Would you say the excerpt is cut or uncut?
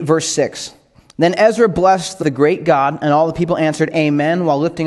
cut